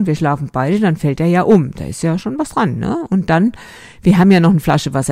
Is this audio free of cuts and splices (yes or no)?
yes